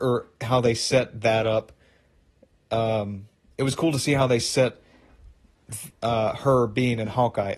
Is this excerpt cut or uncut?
uncut